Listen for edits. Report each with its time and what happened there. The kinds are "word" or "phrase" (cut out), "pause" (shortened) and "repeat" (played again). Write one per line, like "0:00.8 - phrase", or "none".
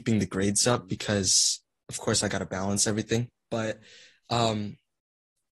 none